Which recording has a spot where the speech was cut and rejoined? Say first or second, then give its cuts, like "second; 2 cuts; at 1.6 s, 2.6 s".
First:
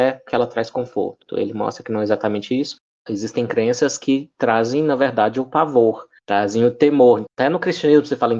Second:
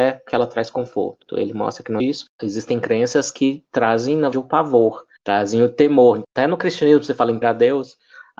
second; 4 cuts; at 2.0 s, 2.3 s, 4.3 s, 7.4 s